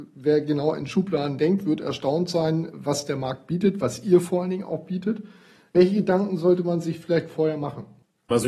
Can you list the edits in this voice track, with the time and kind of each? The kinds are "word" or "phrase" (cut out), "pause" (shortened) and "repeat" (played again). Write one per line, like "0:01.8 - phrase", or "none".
none